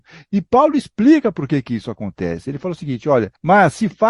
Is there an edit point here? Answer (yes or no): no